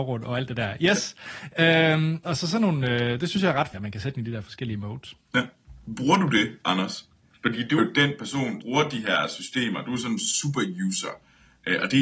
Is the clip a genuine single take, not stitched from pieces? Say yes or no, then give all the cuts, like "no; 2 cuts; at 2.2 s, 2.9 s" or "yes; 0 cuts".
no; 4 cuts; at 2.2 s, 3.7 s, 7.8 s, 8.6 s